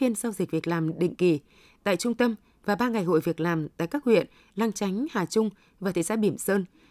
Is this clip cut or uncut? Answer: uncut